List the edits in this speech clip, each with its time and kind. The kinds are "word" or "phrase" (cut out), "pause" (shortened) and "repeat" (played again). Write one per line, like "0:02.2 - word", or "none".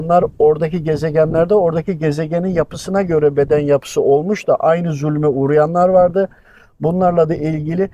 none